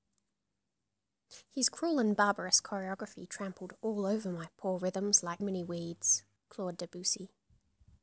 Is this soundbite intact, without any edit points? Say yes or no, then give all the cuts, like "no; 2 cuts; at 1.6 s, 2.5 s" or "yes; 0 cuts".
no; 2 cuts; at 5.4 s, 6.4 s